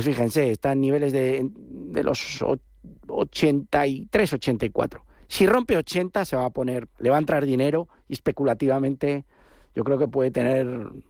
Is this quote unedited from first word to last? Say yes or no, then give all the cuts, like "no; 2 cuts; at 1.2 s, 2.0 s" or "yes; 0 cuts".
yes; 0 cuts